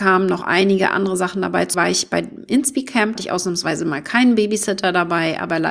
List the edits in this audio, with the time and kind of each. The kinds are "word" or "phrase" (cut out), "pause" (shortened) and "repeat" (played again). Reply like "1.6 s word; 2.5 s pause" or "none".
1.7 s word; 3.1 s phrase

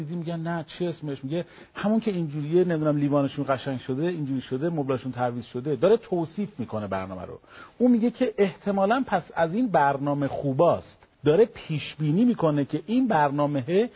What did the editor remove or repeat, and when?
11.1 s pause

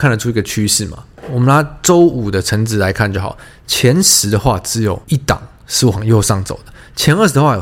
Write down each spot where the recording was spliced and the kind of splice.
5.0 s pause

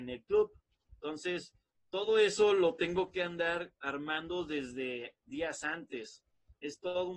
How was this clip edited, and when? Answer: none

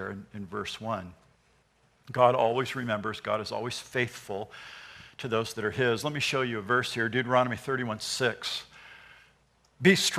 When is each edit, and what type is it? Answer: none

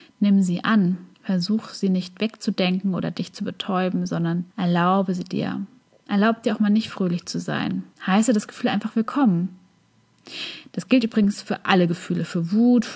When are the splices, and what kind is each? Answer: 1.1 s pause; 4.5 s pause; 5.8 s pause; 7.9 s pause

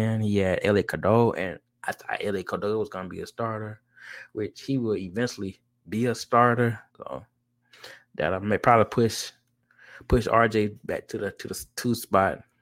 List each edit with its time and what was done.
6.9 s pause

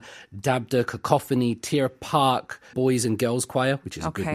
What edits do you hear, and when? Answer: 2.7 s word

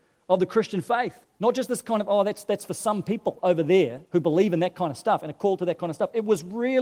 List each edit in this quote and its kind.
1.2 s pause; 4.1 s pause

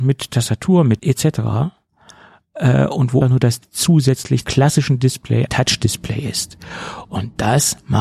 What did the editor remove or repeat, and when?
1.0 s word; 3.2 s word; 3.6 s word; 4.4 s word; 5.5 s word

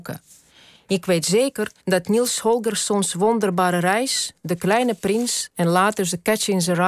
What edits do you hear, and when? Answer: 1.8 s pause

